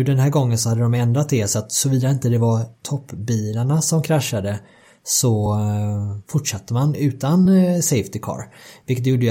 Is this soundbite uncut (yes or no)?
yes